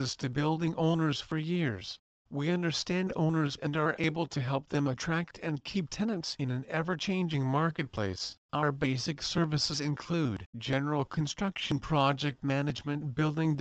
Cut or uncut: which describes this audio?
cut